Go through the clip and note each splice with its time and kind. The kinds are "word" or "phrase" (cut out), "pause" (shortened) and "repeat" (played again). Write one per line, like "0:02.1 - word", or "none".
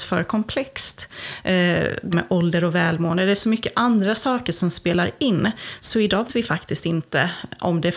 0:02.1 - word
0:06.3 - word